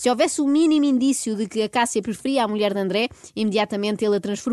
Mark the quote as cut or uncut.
uncut